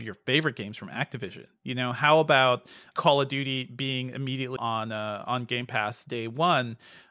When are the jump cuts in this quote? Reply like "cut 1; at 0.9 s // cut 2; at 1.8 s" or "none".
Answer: cut 1; at 2.9 s // cut 2; at 4.6 s

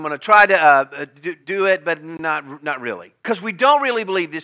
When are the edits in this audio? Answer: cut 1; at 1.4 s // cut 2; at 3.2 s

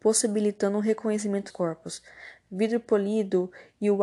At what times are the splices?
cut 1; at 1.5 s

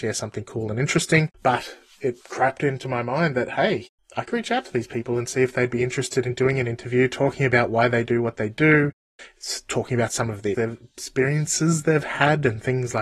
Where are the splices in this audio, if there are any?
cut 1; at 1.3 s // cut 2; at 2.2 s // cut 3; at 4.0 s // cut 4; at 4.3 s // cut 5; at 10.5 s

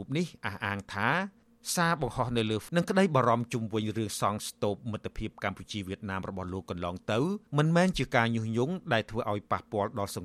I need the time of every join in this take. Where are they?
cut 1; at 2.7 s // cut 2; at 7.5 s

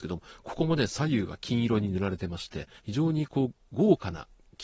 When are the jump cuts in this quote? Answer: cut 1; at 2.8 s

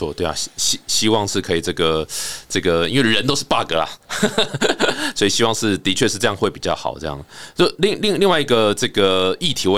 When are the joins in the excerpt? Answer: none

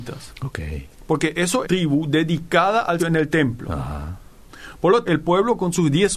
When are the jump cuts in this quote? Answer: cut 1; at 1.6 s // cut 2; at 3.0 s // cut 3; at 5.1 s

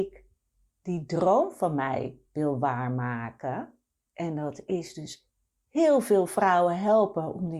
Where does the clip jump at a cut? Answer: none

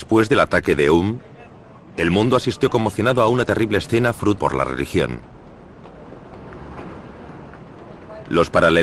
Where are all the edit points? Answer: cut 1; at 4.4 s

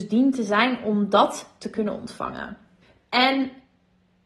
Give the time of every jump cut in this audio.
cut 1; at 2.8 s

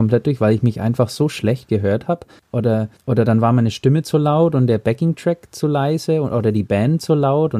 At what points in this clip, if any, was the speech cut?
none

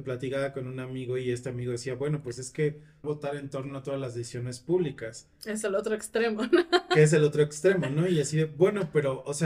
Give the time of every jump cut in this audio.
cut 1; at 3.0 s

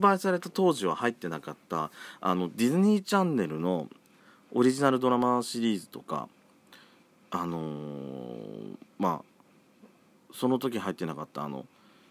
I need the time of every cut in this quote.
none

